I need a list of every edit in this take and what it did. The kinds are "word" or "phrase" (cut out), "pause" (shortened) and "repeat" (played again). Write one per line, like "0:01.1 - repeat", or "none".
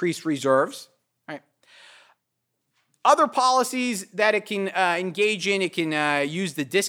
none